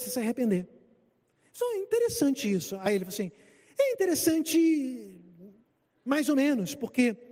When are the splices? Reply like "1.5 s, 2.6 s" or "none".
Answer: none